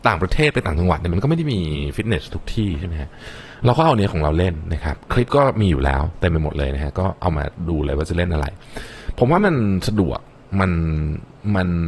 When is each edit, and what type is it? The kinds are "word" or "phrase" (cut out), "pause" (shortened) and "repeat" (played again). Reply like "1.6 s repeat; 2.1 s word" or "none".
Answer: none